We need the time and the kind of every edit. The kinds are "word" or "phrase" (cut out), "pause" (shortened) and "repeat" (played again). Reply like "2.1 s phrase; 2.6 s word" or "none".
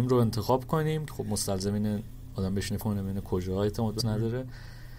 1.1 s word; 2.8 s word; 4.0 s word